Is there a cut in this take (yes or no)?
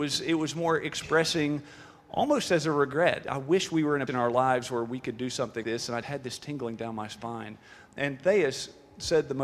yes